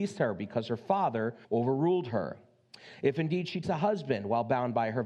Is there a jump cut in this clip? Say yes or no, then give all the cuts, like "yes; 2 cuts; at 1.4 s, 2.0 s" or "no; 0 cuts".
yes; 2 cuts; at 1.4 s, 3.6 s